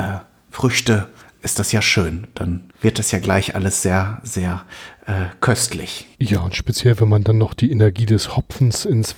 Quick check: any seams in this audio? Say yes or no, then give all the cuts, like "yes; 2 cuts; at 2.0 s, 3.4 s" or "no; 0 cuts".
yes; 2 cuts; at 2.7 s, 6.1 s